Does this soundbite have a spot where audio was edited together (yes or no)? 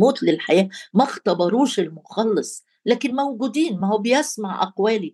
no